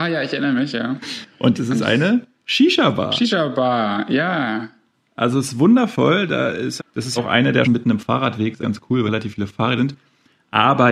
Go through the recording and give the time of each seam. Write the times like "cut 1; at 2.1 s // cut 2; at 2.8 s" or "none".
cut 1; at 1.6 s // cut 2; at 6.8 s // cut 3; at 7.2 s // cut 4; at 7.6 s // cut 5; at 8.6 s // cut 6; at 9.1 s // cut 7; at 9.8 s